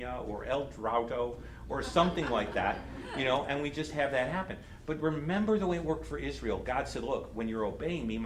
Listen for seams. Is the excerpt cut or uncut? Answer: uncut